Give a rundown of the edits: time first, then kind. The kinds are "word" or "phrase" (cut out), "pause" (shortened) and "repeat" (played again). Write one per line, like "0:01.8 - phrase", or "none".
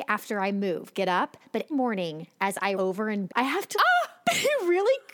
0:01.7 - word
0:02.7 - word
0:03.3 - word
0:03.7 - word